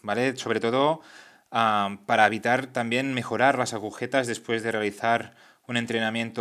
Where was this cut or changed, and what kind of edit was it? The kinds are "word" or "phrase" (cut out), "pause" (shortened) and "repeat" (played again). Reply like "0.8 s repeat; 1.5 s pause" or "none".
none